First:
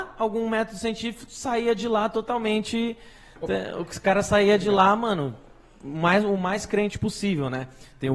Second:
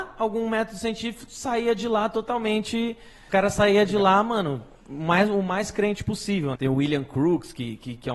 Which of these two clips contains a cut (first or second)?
second